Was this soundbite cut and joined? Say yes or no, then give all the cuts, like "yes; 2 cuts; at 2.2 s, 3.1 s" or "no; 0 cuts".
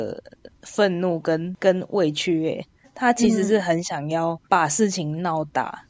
yes; 2 cuts; at 2.8 s, 4.4 s